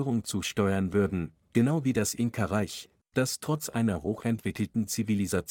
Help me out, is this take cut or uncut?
uncut